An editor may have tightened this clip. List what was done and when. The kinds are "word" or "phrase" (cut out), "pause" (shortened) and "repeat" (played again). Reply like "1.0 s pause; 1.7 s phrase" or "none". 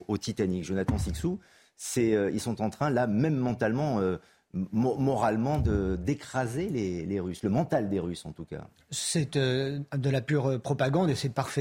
none